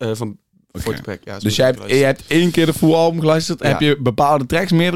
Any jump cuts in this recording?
no; 0 cuts

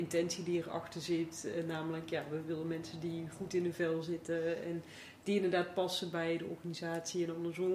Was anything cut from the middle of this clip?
no; 0 cuts

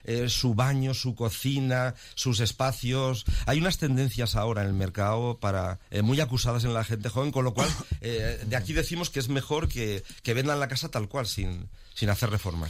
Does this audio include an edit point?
yes; 1 cut; at 5.8 s

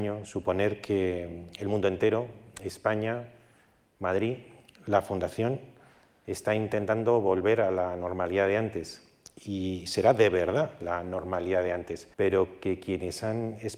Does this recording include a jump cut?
yes; 1 cut; at 12.1 s

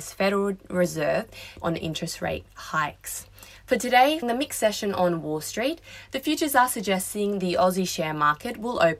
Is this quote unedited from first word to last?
no; 2 cuts; at 1.6 s, 4.2 s

